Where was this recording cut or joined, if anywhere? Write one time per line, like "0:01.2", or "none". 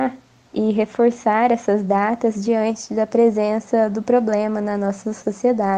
none